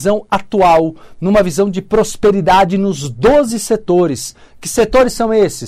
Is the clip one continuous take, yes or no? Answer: yes